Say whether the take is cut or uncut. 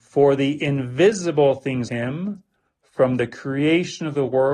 cut